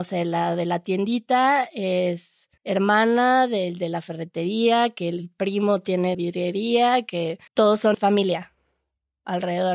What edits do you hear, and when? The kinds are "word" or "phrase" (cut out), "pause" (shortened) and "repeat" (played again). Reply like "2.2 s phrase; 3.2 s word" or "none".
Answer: 2.6 s pause; 6.1 s word; 7.5 s pause; 7.9 s word